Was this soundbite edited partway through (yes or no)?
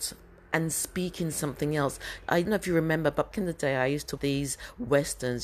yes